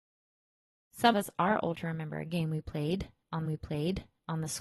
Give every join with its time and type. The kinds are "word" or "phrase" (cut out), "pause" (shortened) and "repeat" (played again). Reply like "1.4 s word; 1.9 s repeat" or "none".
1.1 s word; 1.7 s word; 3.4 s repeat